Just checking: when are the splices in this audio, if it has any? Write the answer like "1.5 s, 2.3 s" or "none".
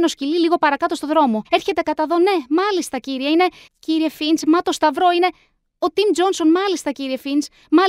1.4 s, 3.7 s

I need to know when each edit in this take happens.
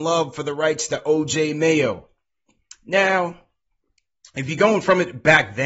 none

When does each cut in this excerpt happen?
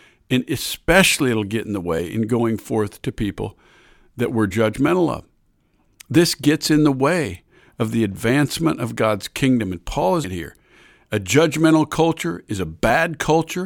10.2 s

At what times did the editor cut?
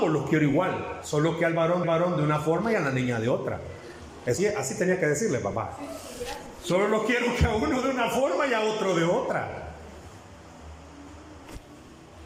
1.8 s, 4.4 s

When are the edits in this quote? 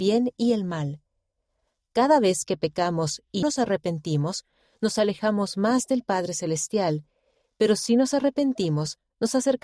3.4 s

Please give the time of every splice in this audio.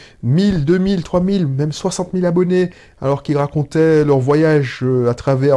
none

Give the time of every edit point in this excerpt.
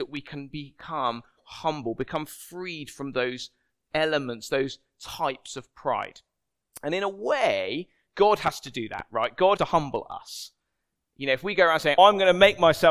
9.6 s, 12.0 s

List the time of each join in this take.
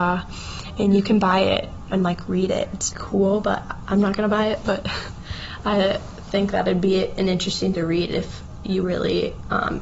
1.9 s, 2.9 s, 7.7 s, 8.8 s

